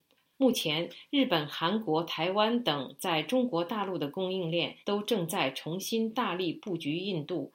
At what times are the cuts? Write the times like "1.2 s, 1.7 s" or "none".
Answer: 4.8 s